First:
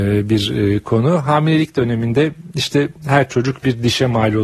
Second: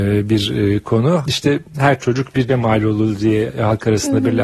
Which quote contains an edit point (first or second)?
second